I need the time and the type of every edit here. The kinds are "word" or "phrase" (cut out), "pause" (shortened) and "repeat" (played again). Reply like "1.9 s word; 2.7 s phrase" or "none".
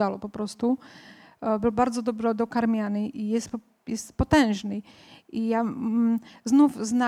none